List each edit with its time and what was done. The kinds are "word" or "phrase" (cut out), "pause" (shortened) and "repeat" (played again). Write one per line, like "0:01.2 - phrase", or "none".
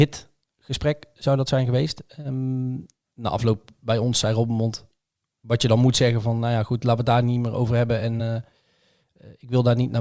none